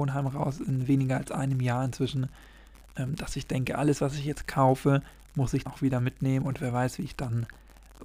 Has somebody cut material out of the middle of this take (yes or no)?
yes